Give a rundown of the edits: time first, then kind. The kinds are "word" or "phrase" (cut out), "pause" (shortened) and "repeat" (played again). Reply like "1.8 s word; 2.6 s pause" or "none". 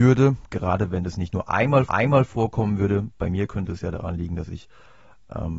1.9 s repeat